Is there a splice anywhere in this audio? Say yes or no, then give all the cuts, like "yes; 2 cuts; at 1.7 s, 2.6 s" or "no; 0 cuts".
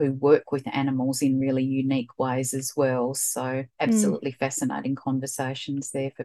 no; 0 cuts